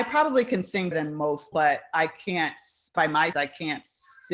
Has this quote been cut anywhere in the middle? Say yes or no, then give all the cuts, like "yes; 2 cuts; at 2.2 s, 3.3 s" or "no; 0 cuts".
yes; 4 cuts; at 0.9 s, 1.5 s, 2.9 s, 3.3 s